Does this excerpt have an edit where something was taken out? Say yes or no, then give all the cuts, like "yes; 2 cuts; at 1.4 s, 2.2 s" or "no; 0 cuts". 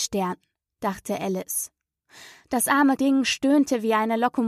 yes; 1 cut; at 3.0 s